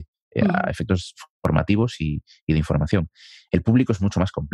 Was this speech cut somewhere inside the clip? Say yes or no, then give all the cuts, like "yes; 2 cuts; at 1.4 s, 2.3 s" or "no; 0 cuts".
no; 0 cuts